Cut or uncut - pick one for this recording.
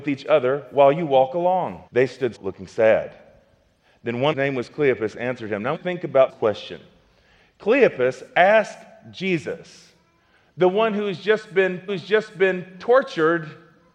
cut